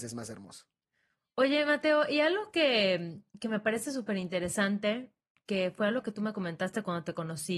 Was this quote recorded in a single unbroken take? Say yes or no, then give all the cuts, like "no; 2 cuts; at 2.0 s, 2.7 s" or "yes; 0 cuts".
yes; 0 cuts